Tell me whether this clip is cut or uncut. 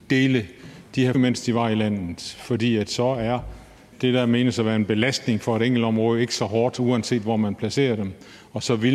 cut